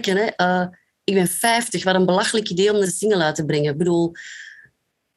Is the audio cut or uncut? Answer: cut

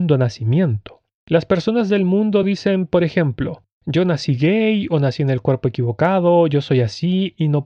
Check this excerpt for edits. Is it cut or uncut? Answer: uncut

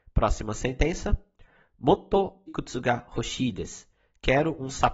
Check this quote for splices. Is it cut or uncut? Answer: cut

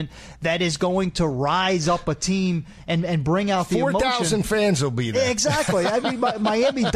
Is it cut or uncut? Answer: uncut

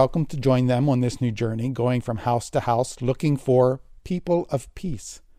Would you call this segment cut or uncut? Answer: uncut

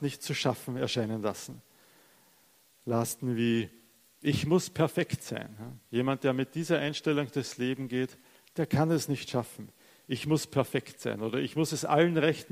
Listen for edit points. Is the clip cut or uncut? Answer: uncut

